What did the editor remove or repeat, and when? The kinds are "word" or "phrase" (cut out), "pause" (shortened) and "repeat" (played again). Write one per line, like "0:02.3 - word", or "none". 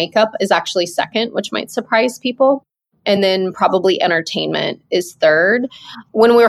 none